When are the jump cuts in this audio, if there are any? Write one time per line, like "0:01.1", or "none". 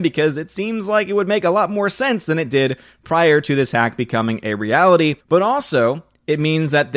0:05.2